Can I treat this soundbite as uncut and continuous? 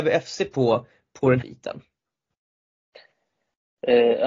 no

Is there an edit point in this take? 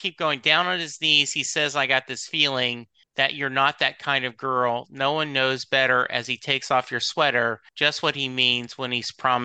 yes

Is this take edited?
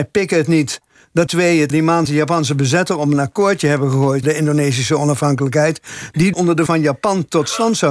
yes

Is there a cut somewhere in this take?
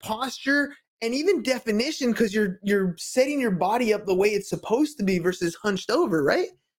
no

